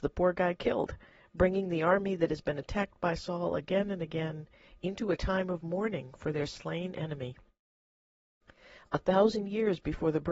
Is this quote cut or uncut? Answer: uncut